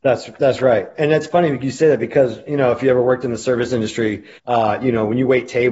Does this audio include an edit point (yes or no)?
yes